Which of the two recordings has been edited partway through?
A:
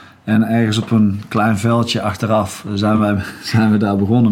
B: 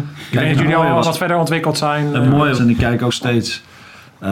B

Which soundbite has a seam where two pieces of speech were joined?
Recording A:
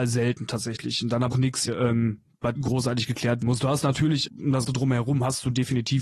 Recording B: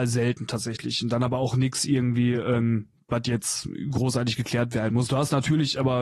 A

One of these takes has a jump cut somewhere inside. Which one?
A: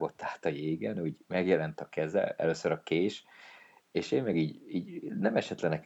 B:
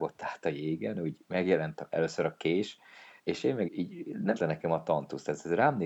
B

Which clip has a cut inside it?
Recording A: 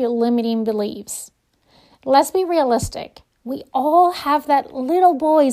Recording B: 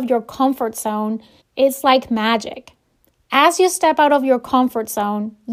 B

